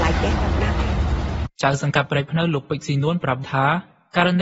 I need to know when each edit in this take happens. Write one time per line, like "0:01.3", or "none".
0:01.5
0:03.4